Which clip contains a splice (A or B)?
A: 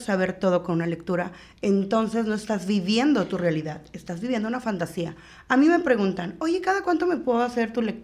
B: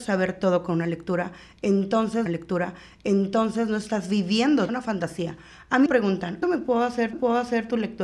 B